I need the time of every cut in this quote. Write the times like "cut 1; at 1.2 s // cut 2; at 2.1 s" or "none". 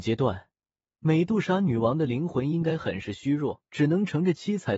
cut 1; at 3.7 s